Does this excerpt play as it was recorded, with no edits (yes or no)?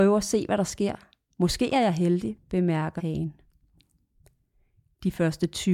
no